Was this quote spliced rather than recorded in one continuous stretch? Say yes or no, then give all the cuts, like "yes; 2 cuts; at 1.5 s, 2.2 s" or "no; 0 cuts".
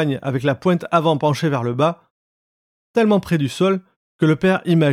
no; 0 cuts